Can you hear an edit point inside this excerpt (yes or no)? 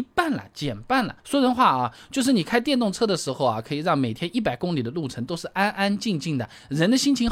yes